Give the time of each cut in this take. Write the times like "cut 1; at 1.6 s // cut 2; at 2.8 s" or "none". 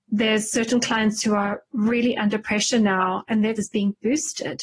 cut 1; at 3.6 s